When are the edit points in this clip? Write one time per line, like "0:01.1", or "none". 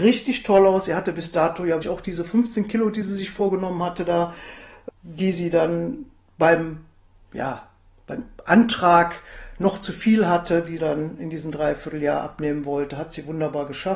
0:01.8
0:10.8